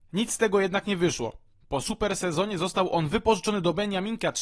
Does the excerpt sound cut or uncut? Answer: uncut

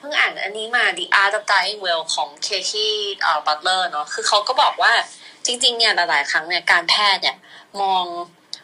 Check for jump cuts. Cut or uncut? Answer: uncut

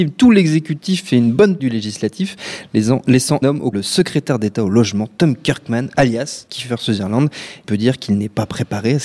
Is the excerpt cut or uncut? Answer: cut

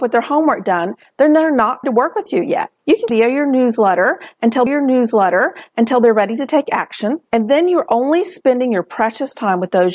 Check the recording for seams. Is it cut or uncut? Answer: cut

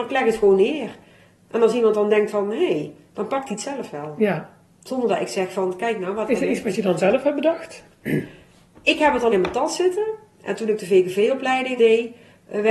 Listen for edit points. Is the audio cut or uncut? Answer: cut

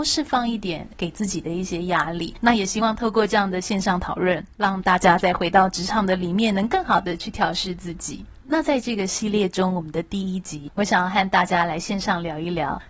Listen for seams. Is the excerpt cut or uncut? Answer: cut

